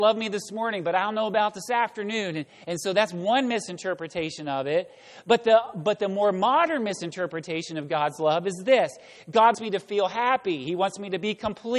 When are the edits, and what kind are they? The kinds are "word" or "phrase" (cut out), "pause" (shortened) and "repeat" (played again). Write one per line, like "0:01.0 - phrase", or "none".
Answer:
0:09.5 - word